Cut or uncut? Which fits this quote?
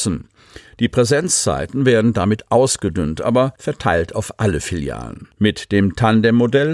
cut